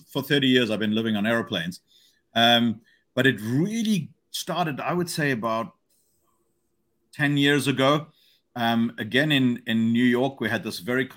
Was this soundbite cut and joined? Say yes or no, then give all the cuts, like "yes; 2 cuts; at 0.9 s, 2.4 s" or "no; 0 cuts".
yes; 1 cut; at 4.2 s